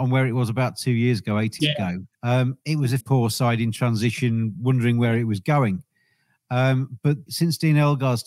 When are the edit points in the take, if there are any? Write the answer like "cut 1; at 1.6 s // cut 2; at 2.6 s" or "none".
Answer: cut 1; at 1.6 s // cut 2; at 2.1 s // cut 3; at 3.0 s // cut 4; at 7.3 s